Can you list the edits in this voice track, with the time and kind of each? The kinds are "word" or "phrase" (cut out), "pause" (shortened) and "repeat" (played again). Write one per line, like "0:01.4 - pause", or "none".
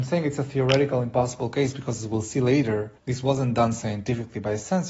0:03.0 - pause

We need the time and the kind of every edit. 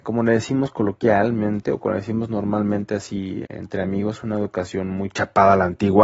0:03.4 - word

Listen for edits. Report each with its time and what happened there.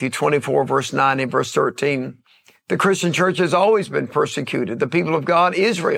none

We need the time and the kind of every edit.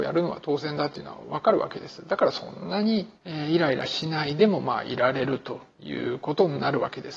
0:03.2 - pause
0:05.7 - pause

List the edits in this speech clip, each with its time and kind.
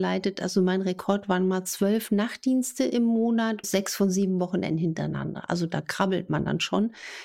0:03.6 - word

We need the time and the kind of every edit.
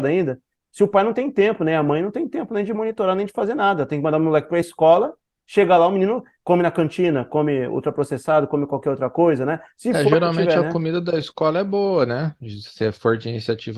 none

